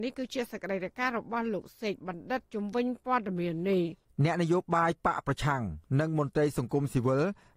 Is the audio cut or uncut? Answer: cut